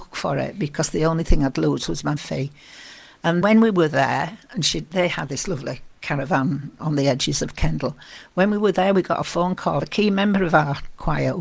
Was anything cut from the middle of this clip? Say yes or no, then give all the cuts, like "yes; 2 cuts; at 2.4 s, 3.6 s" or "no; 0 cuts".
yes; 3 cuts; at 2.2 s, 3.4 s, 9.8 s